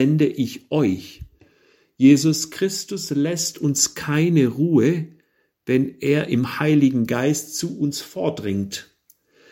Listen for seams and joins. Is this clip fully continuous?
yes; 0 cuts

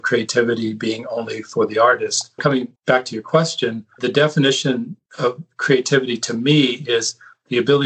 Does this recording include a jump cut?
yes; 4 cuts; at 2.4 s, 2.8 s, 4.0 s, 5.1 s

